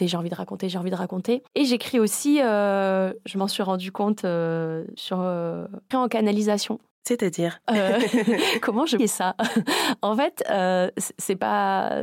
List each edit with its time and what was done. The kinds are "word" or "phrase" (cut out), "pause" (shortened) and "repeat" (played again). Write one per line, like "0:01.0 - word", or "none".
0:01.5 - pause
0:05.0 - word
0:05.9 - phrase
0:07.6 - word
0:09.0 - phrase